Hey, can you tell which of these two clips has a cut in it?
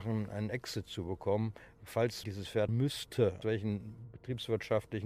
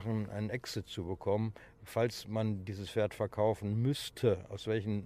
first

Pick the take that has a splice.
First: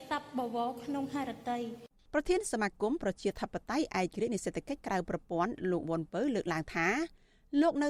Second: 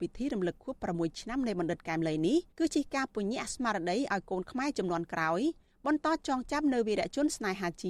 second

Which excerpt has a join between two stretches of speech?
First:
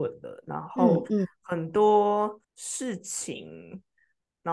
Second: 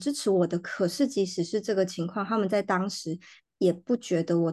first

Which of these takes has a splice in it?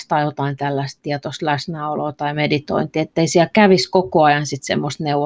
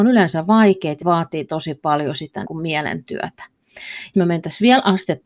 second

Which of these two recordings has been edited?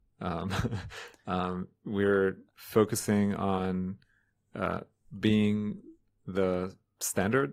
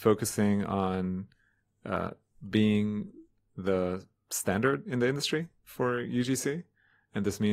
first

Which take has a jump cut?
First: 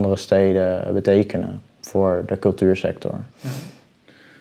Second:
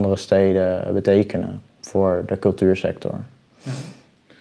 first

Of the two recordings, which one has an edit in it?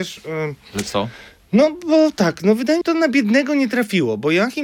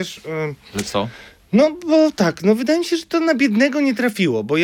first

